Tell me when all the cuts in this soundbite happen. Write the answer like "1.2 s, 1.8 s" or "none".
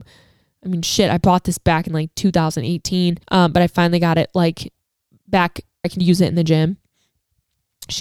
3.2 s, 5.8 s